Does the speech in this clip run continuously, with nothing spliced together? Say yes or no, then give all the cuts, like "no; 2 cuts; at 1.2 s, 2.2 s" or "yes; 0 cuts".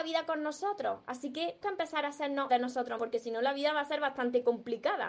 no; 3 cuts; at 1.6 s, 2.5 s, 3.0 s